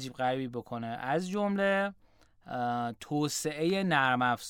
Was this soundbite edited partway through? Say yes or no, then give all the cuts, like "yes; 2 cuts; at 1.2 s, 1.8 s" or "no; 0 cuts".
no; 0 cuts